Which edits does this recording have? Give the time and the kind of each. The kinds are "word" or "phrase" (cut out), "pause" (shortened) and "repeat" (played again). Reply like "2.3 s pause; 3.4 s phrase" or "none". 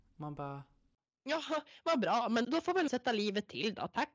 2.4 s word; 2.9 s word